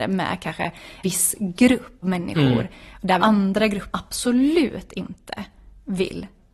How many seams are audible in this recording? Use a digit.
4